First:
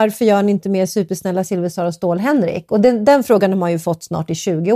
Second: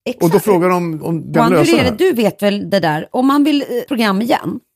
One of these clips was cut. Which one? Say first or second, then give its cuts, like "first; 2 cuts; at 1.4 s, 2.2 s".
second; 3 cuts; at 1.0 s, 1.3 s, 3.9 s